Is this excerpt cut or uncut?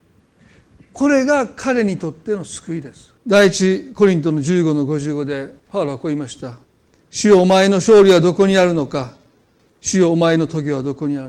cut